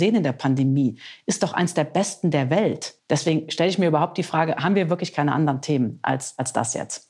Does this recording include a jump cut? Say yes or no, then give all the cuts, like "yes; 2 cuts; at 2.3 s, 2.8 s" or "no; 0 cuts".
yes; 1 cut; at 3.0 s